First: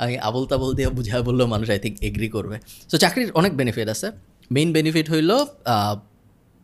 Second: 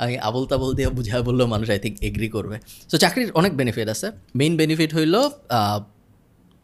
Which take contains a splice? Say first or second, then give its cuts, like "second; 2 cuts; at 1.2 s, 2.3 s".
second; 1 cut; at 4.3 s